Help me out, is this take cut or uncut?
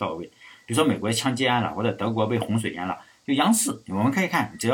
uncut